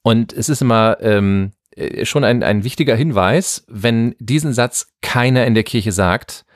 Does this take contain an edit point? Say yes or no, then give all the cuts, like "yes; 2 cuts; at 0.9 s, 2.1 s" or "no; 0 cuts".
no; 0 cuts